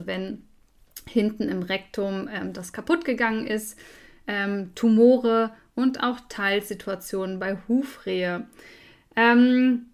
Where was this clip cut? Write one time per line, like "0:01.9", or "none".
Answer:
none